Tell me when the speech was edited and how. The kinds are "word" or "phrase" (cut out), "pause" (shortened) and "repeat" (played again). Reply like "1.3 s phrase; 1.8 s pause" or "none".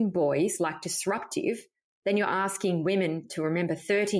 none